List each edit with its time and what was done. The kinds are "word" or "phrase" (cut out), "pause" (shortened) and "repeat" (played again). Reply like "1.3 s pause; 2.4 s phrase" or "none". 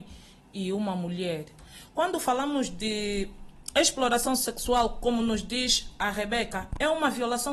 none

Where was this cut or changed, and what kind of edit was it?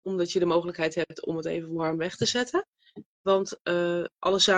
none

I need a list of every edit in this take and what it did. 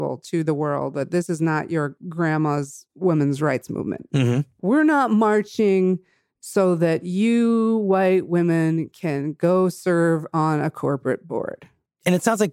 none

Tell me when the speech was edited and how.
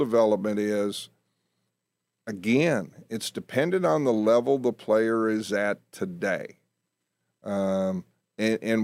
none

